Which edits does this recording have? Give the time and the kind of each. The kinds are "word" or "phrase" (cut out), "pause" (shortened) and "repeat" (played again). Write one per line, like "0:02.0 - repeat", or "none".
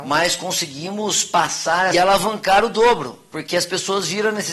0:01.9 - phrase